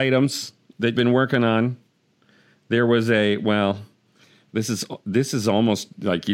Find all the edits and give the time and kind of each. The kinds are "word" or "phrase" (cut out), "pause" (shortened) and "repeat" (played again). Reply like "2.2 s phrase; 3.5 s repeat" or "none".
1.0 s word